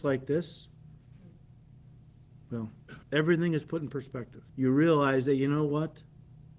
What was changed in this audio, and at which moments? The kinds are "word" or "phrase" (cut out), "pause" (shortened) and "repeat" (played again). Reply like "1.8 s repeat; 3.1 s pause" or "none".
3.0 s pause; 4.5 s pause